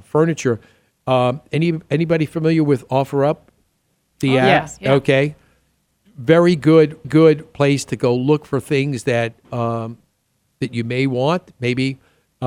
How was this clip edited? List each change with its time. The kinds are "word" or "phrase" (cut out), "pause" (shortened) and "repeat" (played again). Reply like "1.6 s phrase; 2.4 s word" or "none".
7.0 s repeat